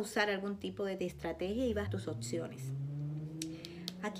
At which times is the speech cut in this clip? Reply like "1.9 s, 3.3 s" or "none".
1.0 s, 1.9 s